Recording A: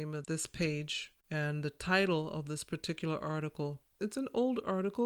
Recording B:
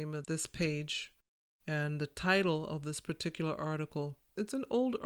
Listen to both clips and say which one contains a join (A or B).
A